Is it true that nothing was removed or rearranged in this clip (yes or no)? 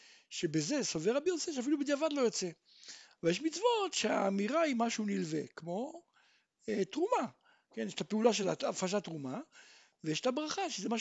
yes